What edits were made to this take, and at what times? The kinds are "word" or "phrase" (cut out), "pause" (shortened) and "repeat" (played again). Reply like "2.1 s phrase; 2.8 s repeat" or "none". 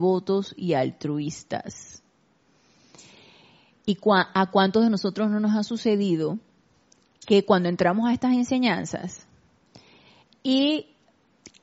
none